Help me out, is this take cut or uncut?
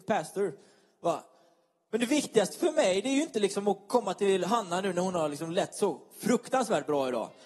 uncut